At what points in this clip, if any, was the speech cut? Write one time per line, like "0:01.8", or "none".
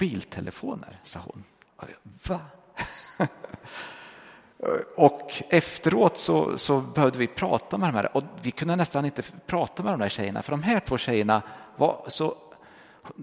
0:01.6

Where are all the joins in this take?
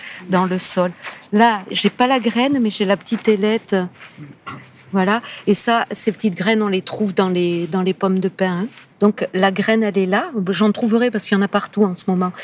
0:08.9

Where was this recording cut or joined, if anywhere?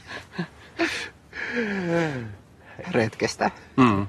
0:02.8

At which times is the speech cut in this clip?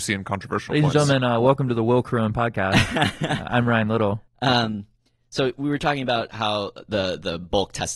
none

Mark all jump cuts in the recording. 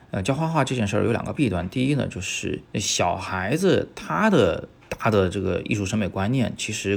0:02.7

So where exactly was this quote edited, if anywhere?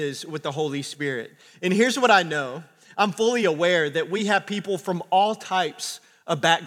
none

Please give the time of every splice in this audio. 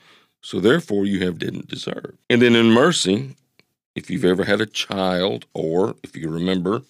0:01.4
0:02.2

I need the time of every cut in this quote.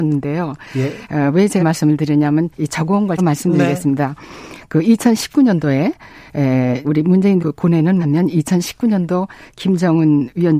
0:01.6
0:02.5
0:03.2
0:06.8
0:07.4
0:08.0

